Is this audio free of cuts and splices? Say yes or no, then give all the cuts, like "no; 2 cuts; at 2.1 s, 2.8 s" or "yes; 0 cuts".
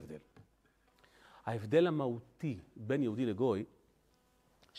yes; 0 cuts